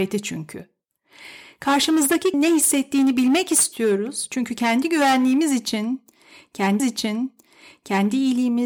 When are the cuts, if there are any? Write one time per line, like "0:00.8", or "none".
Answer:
0:02.3
0:06.8